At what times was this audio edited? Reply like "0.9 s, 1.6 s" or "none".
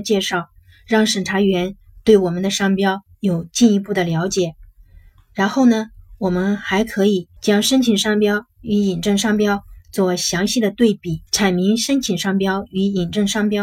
7.4 s, 11.3 s